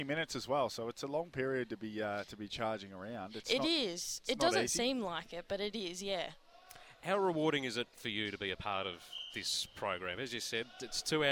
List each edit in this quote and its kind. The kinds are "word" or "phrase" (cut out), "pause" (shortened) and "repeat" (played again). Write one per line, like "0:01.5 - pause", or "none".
none

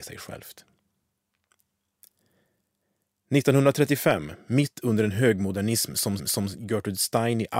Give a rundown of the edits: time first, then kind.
0:06.2 - repeat

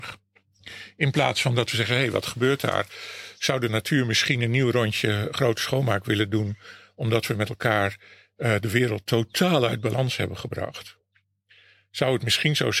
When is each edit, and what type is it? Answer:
none

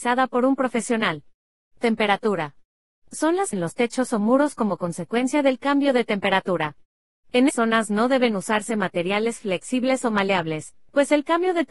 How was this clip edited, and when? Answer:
0:03.5 - word
0:07.5 - word

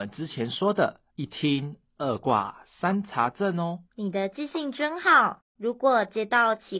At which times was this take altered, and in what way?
0:01.1 - pause
0:03.9 - pause
0:05.5 - pause

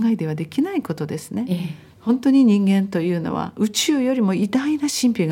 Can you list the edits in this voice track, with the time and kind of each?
0:01.9 - pause

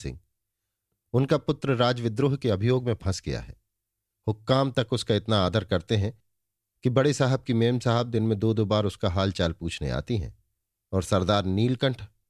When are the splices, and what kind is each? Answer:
none

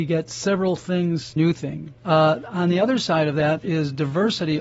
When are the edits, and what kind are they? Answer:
0:01.4 - phrase
0:02.0 - pause
0:03.6 - word

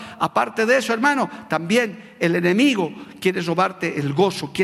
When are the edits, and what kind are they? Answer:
none

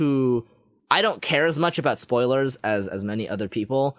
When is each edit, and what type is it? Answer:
none

